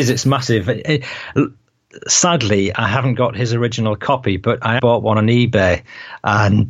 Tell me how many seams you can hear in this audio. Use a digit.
1